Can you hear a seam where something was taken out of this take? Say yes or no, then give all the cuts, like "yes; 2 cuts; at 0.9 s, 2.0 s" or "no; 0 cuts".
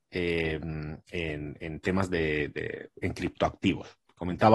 no; 0 cuts